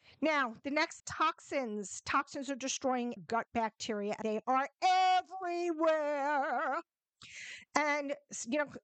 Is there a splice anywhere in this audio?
yes; 3 cuts; at 1.0 s, 3.2 s, 4.2 s

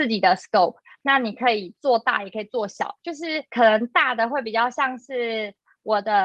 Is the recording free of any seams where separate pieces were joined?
no; 2 cuts; at 3.0 s, 3.5 s

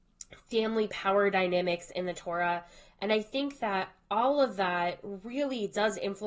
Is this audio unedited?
yes; 0 cuts

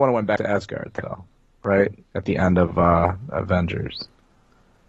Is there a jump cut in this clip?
no; 0 cuts

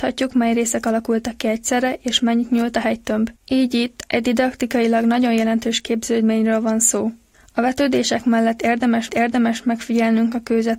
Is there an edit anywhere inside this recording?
yes; 3 cuts; at 3.4 s, 7.3 s, 9.1 s

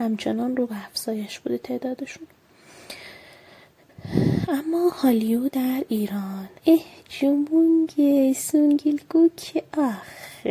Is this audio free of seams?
no; 1 cut; at 6.6 s

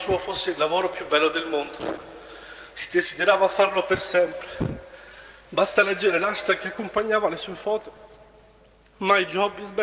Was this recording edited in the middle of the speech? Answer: no; 0 cuts

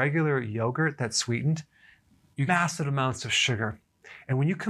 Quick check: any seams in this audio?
yes; 1 cut; at 2.5 s

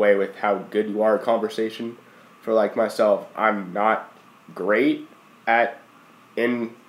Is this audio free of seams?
yes; 0 cuts

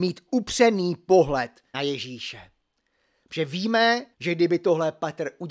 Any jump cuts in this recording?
yes; 2 cuts; at 1.7 s, 4.1 s

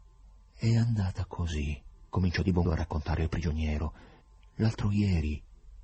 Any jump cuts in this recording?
yes; 2 cuts; at 2.6 s, 4.2 s

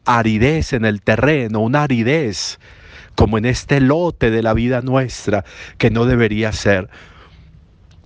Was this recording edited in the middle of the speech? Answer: no; 0 cuts

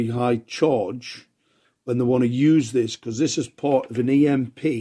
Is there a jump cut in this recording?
no; 0 cuts

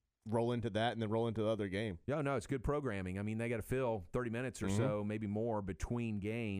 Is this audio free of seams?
yes; 0 cuts

